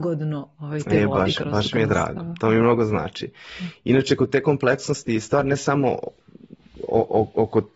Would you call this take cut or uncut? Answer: uncut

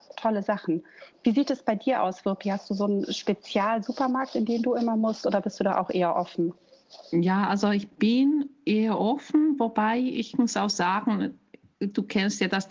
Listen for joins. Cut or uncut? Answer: uncut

